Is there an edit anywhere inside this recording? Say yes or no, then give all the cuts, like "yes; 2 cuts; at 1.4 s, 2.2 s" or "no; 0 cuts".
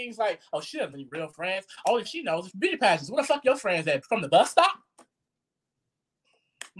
yes; 4 cuts; at 0.9 s, 2.0 s, 2.5 s, 4.0 s